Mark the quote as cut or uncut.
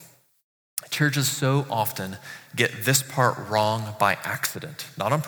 uncut